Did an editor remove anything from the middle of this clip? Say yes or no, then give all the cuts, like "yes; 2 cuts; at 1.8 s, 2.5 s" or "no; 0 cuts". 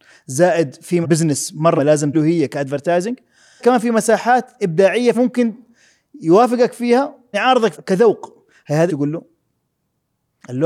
yes; 8 cuts; at 1.0 s, 1.8 s, 2.1 s, 3.6 s, 5.1 s, 7.3 s, 7.7 s, 8.9 s